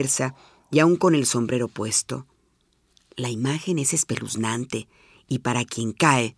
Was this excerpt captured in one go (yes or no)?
yes